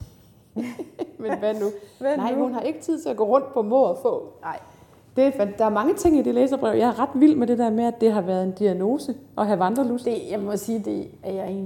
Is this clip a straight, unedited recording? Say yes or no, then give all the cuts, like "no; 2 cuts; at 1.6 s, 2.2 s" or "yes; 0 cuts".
yes; 0 cuts